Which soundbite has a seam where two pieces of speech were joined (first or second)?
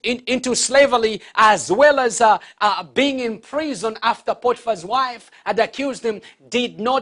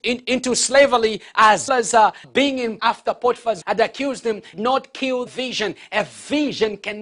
second